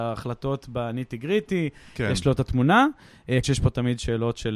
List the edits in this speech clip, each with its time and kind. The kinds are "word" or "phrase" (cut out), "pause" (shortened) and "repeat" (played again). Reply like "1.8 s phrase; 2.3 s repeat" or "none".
3.4 s word